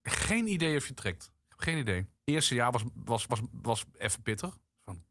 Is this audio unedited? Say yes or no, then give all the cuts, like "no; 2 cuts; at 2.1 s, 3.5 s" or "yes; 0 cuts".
no; 2 cuts; at 2.2 s, 3.3 s